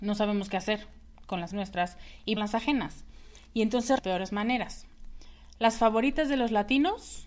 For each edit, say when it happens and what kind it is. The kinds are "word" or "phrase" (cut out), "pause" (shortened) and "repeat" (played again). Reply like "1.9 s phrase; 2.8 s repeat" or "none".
1.5 s word; 2.4 s phrase; 4.0 s phrase